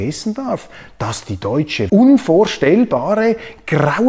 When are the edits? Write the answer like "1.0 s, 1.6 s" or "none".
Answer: 1.9 s